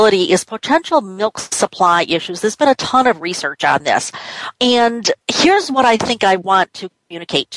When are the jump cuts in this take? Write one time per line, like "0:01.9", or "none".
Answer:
0:05.2

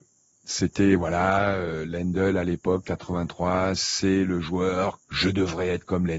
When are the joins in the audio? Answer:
0:05.0

